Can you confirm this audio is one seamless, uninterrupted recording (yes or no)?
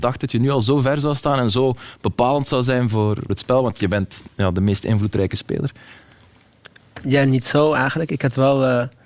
no